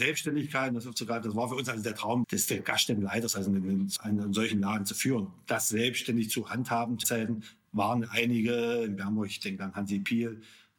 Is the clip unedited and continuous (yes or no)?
no